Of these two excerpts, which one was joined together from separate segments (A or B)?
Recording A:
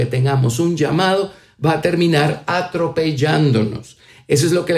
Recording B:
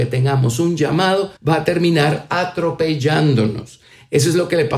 B